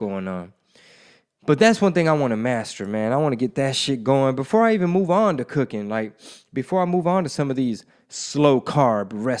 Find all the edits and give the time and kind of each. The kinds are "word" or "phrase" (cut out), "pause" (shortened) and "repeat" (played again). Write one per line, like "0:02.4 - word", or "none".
none